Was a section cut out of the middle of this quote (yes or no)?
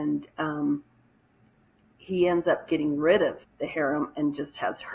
yes